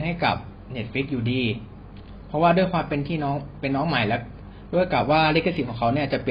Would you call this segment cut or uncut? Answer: uncut